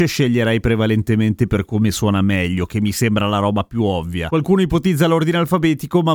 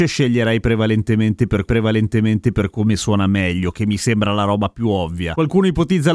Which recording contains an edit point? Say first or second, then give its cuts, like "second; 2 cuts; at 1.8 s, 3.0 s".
second; 1 cut; at 1.7 s